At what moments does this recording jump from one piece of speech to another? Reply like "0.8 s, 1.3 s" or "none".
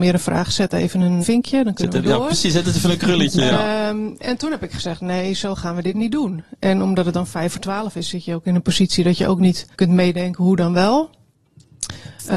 1.2 s, 9.7 s